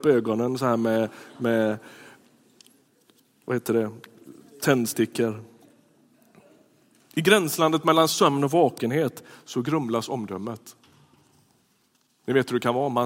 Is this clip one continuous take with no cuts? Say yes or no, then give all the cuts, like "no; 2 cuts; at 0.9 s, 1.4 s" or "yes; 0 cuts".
yes; 0 cuts